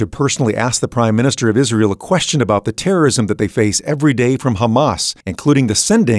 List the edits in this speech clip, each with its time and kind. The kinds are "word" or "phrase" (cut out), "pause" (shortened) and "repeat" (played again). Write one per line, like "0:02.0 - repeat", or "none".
0:05.2 - pause